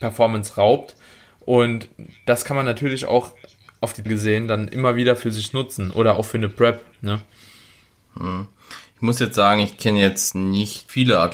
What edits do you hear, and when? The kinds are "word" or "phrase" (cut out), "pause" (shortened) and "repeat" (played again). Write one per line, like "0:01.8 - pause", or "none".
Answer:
0:04.1 - word